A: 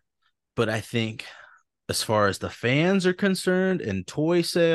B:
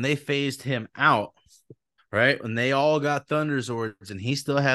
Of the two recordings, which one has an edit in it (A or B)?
B